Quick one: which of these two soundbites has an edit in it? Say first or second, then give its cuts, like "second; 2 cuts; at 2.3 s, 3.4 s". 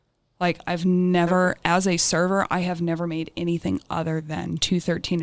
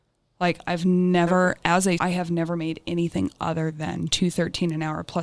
second; 1 cut; at 2.0 s